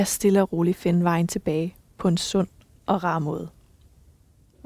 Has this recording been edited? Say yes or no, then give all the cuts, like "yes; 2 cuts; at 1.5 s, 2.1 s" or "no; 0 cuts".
no; 0 cuts